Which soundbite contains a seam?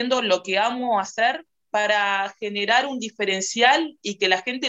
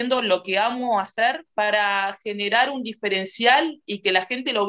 second; 1 cut; at 1.5 s

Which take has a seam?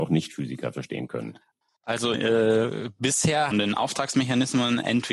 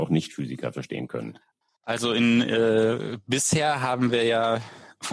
first; 2 cuts; at 2.1 s, 3.5 s

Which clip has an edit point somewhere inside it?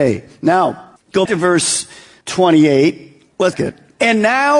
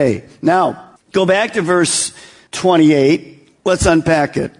first; 2 cuts; at 1.2 s, 3.5 s

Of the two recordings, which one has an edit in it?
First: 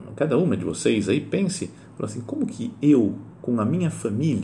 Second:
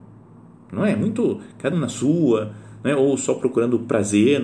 second; 1 cut; at 1.7 s

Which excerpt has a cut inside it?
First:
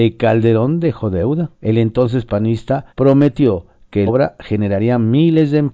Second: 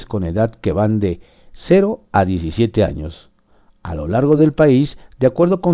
first; 4 cuts; at 1.6 s, 2.3 s, 2.9 s, 4.1 s

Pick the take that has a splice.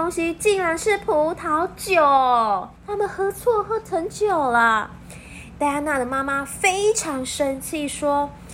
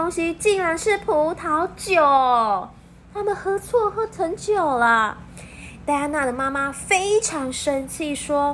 first; 1 cut; at 2.8 s

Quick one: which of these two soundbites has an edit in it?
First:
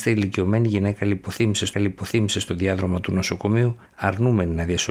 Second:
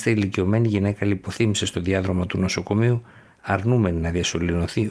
first; 2 cuts; at 1.7 s, 3.9 s

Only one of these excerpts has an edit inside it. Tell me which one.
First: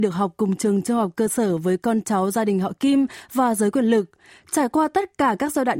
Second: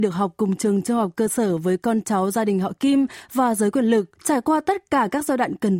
second; 1 cut; at 4.2 s

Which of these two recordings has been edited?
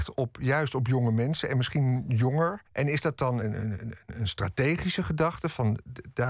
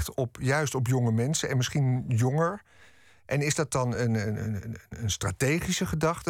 first; 2 cuts; at 2.7 s, 3.4 s

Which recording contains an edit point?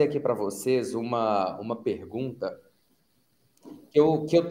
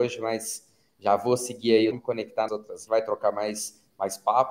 second; 3 cuts; at 1.9 s, 2.5 s, 2.9 s

